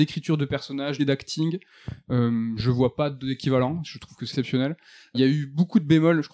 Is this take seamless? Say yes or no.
no